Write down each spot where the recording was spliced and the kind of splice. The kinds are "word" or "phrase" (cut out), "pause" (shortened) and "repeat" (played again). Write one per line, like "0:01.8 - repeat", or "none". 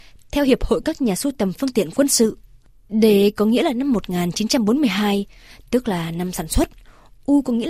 none